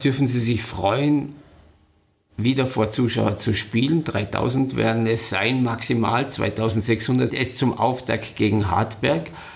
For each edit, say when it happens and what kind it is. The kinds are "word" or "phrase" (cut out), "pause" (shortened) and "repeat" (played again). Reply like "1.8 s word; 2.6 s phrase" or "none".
7.3 s word